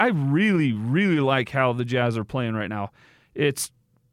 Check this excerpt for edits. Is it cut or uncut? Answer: uncut